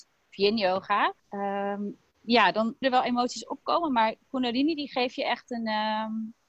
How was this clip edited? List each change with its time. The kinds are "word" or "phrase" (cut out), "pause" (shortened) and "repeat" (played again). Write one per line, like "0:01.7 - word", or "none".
0:01.2 - pause
0:02.8 - word